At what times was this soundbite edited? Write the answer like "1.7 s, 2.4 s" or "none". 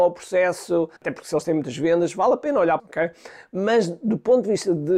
1.0 s, 2.8 s